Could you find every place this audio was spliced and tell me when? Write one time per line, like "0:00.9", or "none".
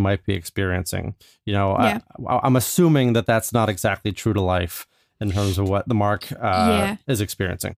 none